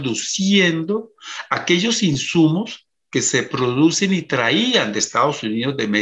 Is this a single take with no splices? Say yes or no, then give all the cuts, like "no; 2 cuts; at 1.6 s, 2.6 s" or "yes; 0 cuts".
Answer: yes; 0 cuts